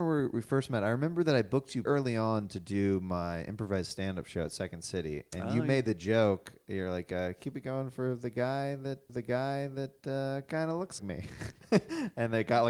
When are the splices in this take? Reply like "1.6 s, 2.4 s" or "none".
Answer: 1.9 s, 9.1 s, 11.0 s